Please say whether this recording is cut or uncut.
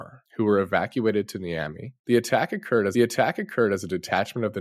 cut